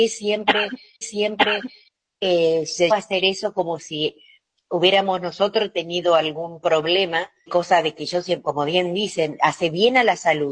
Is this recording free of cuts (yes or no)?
no